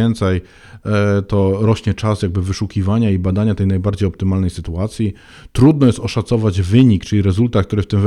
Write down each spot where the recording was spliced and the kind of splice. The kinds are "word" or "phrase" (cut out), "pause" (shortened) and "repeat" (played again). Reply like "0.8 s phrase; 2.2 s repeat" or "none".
none